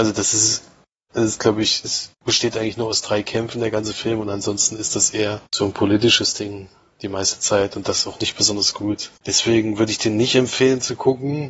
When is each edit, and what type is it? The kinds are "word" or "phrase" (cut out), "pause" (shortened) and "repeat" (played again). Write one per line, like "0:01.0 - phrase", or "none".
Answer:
0:02.1 - pause
0:05.5 - pause
0:09.2 - pause